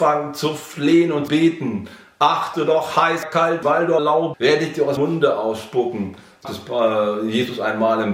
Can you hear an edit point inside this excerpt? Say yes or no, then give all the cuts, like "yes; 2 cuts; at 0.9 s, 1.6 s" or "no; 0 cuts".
yes; 8 cuts; at 1.3 s, 2.5 s, 3.2 s, 3.6 s, 4.0 s, 4.3 s, 5.0 s, 6.4 s